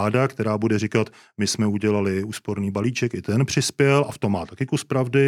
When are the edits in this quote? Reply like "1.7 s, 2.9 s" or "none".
none

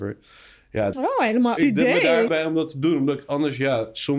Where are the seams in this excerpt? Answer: 0.9 s, 1.6 s, 2.3 s

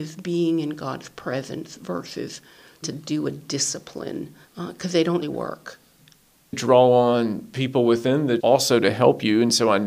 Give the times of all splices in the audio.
2.8 s, 4.4 s, 5.2 s, 8.4 s

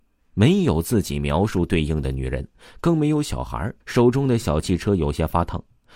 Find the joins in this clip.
3.8 s

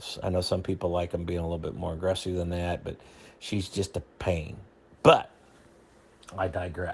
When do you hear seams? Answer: none

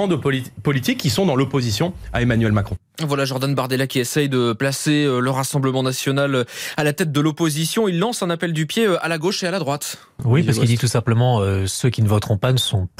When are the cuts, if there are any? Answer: none

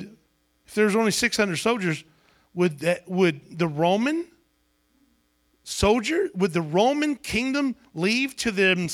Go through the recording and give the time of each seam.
none

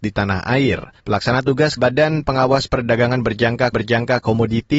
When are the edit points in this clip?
1.0 s, 1.8 s, 3.7 s

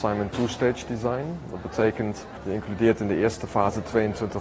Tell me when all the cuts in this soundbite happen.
none

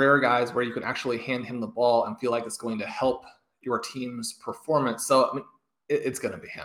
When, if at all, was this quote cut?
none

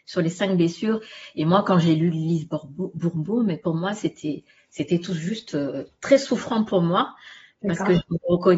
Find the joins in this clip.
none

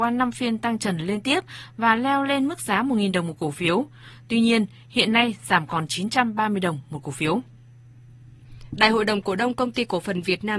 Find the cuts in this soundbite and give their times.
none

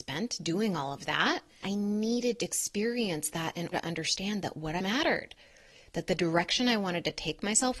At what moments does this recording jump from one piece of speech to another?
1.6 s, 2.4 s, 3.7 s, 4.8 s

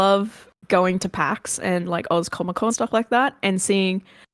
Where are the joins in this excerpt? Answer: 2.7 s

